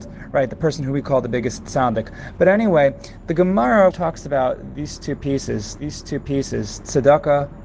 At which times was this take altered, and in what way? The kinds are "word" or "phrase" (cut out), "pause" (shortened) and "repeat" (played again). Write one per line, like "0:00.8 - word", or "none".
0:03.9 - word
0:05.8 - repeat

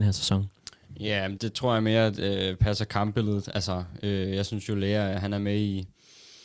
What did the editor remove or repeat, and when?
0:01.4 - word

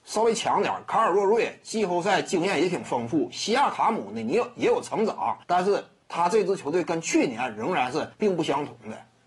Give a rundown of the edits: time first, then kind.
0:05.4 - pause
0:08.1 - pause

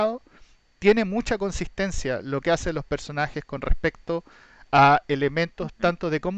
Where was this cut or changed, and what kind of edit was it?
none

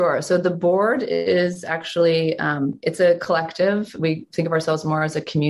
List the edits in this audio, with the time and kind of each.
none

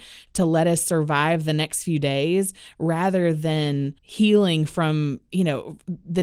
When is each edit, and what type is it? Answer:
0:04.0 - pause

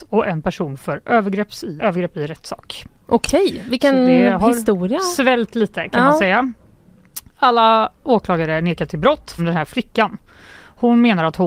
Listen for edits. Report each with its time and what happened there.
0:01.8 - phrase
0:09.4 - word

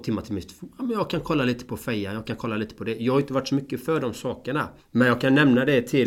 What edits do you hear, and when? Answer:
0:04.8 - pause

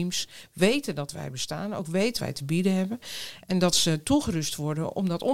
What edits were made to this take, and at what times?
0:02.2 - word

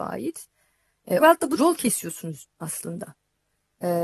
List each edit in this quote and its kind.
0:01.2 - word
0:01.6 - word
0:02.5 - word

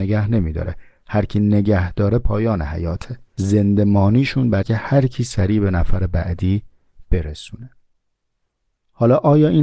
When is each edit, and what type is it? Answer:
0:03.3 - pause
0:04.6 - word

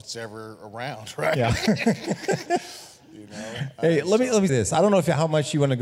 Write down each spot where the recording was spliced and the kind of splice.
0:04.5 - word

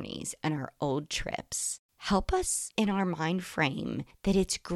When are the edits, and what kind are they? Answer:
0:01.8 - pause
0:02.8 - phrase

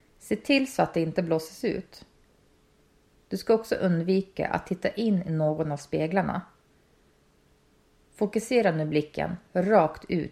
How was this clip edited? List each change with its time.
none

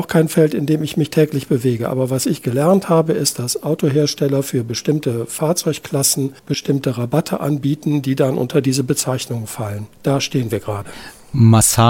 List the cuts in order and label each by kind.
0:06.4 - pause
0:09.9 - pause

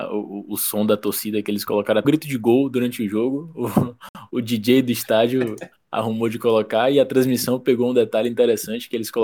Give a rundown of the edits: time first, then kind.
0:02.0 - word

